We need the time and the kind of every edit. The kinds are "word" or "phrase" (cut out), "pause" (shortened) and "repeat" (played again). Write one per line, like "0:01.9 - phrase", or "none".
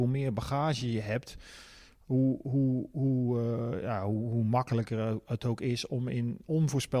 none